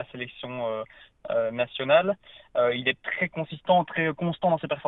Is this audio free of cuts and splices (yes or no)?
yes